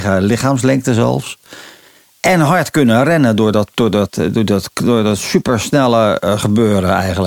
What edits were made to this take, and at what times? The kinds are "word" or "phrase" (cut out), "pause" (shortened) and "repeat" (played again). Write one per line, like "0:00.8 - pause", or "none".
none